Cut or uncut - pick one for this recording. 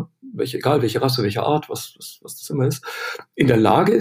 uncut